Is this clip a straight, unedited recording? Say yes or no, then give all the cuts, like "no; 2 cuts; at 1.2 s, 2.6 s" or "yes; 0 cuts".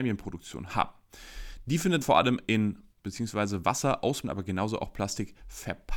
no; 3 cuts; at 2.0 s, 2.9 s, 4.2 s